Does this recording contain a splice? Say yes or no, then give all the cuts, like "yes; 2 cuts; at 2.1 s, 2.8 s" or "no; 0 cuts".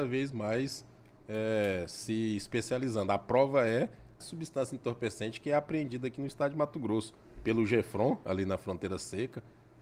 yes; 1 cut; at 4.2 s